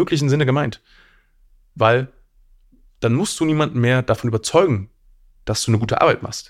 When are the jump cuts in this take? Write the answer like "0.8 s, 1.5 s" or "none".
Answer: none